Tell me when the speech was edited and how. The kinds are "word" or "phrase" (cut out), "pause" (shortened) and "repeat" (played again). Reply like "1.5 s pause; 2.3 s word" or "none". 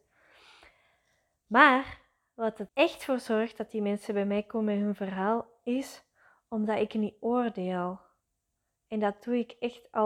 2.7 s word